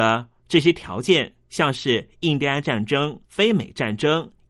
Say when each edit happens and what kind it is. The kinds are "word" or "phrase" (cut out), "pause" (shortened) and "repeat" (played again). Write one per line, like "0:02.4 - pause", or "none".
0:03.2 - pause